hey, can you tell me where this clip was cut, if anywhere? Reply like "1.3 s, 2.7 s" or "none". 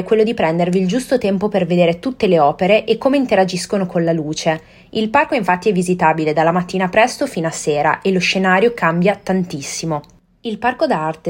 none